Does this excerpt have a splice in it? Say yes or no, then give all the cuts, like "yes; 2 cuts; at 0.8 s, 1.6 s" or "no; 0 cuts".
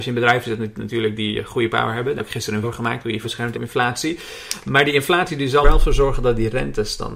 yes; 6 cuts; at 1.7 s, 2.2 s, 2.6 s, 3.2 s, 3.5 s, 5.6 s